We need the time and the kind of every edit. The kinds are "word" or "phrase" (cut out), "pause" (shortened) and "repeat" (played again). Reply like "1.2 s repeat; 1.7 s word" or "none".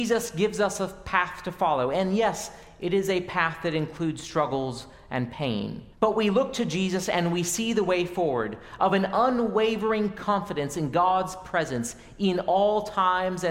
5.9 s pause